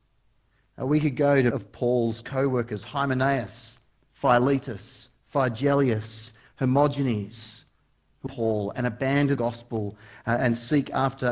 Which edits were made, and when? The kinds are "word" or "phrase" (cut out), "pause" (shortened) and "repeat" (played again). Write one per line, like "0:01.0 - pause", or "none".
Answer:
0:01.5 - word
0:08.3 - word
0:09.4 - word

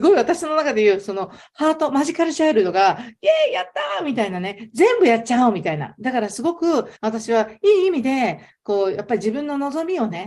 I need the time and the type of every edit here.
0:07.0 - pause

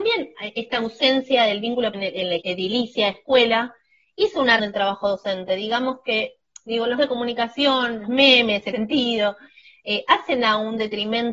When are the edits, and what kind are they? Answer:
0:01.9 - word
0:02.4 - word
0:04.6 - word
0:07.0 - word
0:08.0 - word
0:08.7 - word

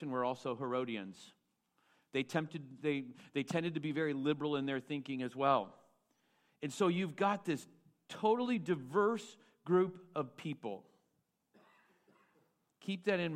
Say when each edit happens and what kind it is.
none

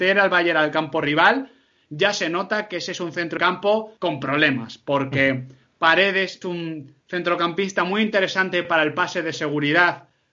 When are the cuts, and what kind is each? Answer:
0:03.4 - word
0:04.0 - pause
0:06.4 - word
0:07.0 - pause

